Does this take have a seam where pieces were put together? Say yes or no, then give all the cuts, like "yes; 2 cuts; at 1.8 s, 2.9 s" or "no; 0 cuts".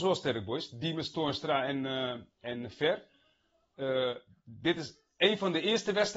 no; 0 cuts